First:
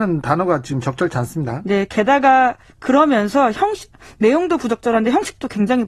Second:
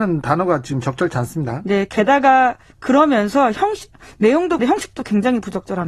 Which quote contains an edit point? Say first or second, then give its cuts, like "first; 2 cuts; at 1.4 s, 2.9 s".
second; 1 cut; at 4.6 s